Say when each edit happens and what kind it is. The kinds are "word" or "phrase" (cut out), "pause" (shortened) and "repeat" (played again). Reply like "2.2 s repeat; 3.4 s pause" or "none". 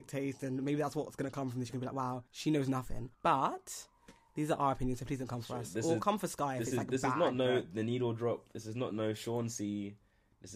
2.3 s pause; 3.1 s pause